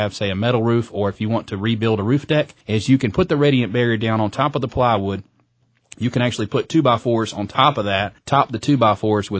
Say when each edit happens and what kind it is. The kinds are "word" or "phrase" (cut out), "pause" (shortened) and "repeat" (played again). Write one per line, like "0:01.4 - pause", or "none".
0:02.6 - pause